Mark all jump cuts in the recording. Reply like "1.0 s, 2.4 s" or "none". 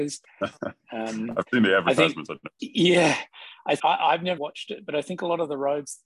2.6 s, 3.8 s, 4.4 s